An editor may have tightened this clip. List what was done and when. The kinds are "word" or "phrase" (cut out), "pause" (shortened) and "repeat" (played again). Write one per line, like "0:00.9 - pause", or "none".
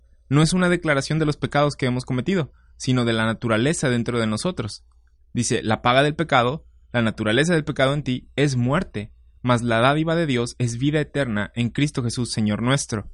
none